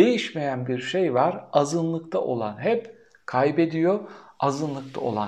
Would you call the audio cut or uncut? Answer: uncut